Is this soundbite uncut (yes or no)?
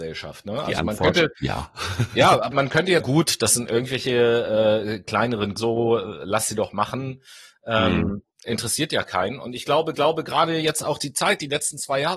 no